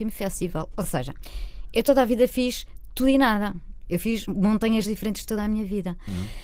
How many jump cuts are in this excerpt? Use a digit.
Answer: 1